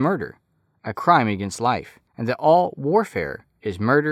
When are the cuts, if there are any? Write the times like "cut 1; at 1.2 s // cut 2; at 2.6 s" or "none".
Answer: cut 1; at 2.1 s